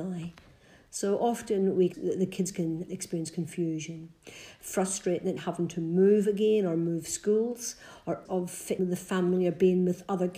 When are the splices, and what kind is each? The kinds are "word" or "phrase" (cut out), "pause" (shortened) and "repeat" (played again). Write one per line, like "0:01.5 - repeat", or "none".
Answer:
0:01.9 - word
0:02.9 - word
0:05.4 - word
0:08.2 - word
0:08.8 - word